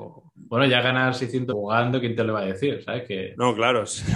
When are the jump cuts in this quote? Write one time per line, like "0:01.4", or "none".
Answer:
0:01.5